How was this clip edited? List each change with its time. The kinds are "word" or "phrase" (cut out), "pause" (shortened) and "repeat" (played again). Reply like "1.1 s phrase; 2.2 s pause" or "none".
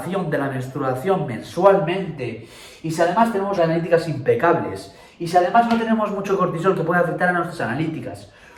3.6 s word